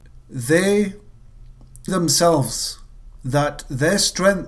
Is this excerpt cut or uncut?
cut